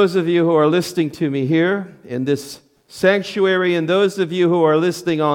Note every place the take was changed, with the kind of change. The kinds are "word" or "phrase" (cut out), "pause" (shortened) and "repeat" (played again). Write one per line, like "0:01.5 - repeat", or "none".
none